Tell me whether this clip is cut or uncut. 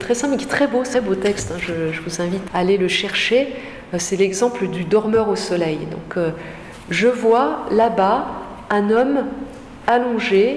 cut